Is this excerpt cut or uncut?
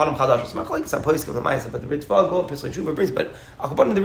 uncut